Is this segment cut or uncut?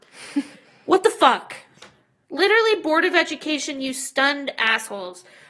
uncut